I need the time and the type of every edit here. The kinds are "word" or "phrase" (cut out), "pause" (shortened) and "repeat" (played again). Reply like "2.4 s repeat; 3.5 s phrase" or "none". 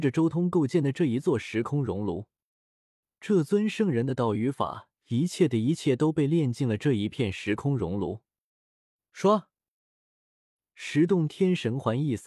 5.0 s pause